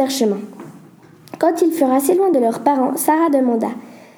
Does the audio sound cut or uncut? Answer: uncut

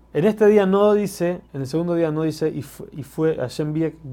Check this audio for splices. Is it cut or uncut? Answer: cut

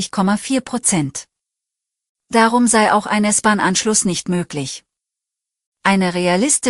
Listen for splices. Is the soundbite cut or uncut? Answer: uncut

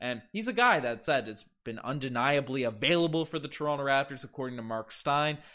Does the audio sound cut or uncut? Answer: uncut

